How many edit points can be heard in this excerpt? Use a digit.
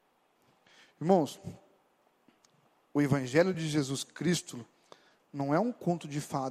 0